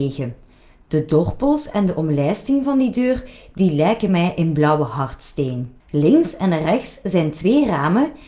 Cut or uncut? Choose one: cut